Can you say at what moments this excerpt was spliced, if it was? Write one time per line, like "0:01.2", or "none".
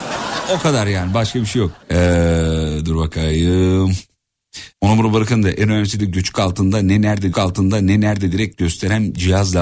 0:01.8
0:04.7
0:06.0
0:07.3